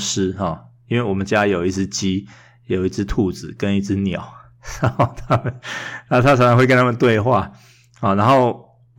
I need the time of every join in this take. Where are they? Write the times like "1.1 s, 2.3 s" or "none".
none